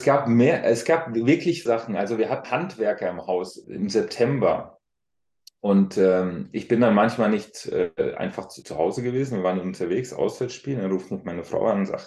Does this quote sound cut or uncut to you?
cut